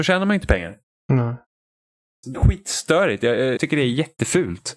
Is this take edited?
yes; 2 cuts; at 2.3 s, 3.6 s

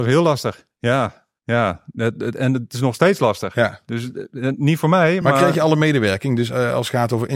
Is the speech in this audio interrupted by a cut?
no; 0 cuts

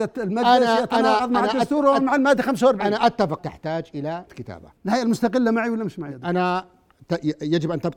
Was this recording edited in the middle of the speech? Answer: yes; 3 cuts; at 3.4 s, 4.3 s, 4.8 s

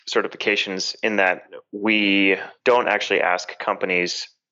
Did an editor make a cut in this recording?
yes; 1 cut; at 2.6 s

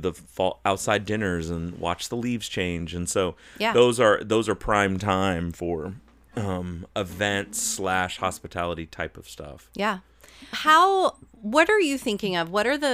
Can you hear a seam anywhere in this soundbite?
yes; 1 cut; at 10.5 s

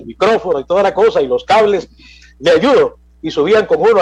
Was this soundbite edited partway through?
no; 0 cuts

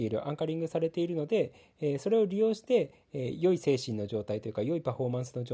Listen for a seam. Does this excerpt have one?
no; 0 cuts

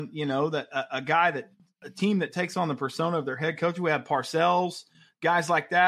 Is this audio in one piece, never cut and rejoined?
yes; 0 cuts

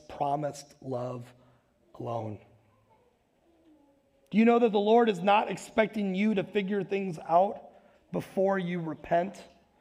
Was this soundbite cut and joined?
no; 0 cuts

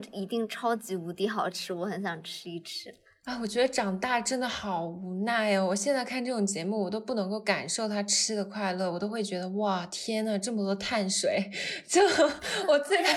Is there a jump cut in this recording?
no; 0 cuts

